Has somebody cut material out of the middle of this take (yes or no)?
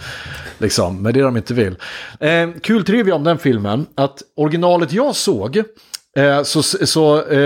no